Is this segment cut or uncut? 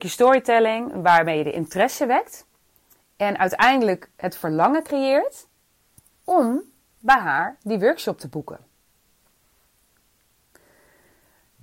uncut